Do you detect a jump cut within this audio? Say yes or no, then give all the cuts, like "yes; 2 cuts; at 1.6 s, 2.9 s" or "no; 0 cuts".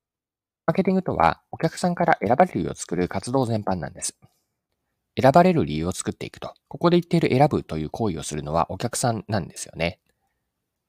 yes; 1 cut; at 6.6 s